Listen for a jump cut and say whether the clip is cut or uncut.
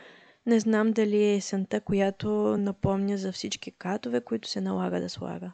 uncut